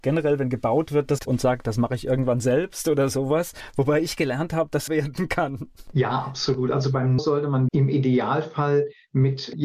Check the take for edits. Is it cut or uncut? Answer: cut